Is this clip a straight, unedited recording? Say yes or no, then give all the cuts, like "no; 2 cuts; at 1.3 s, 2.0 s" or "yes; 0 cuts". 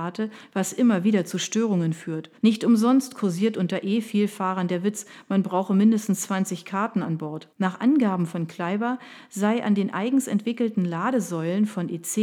no; 2 cuts; at 2.4 s, 7.5 s